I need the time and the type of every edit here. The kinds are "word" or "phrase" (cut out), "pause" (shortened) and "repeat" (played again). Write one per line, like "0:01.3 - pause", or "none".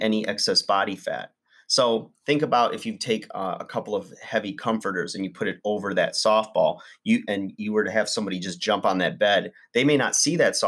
none